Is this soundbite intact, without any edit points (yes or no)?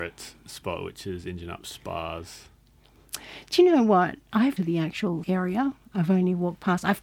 no